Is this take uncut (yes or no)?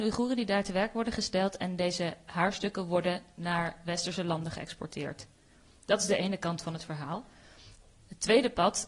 yes